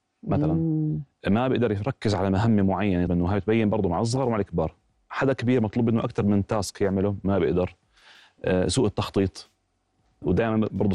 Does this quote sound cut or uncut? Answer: cut